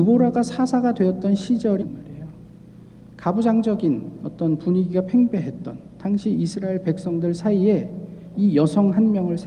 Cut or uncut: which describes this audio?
cut